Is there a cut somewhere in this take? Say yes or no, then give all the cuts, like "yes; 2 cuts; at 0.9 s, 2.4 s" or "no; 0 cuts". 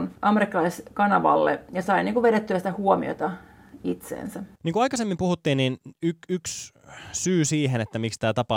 no; 0 cuts